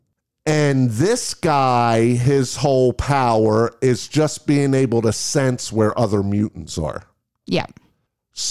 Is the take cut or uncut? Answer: uncut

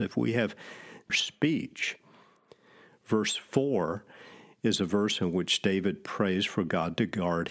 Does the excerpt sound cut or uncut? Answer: cut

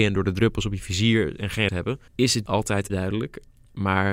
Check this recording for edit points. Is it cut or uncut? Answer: cut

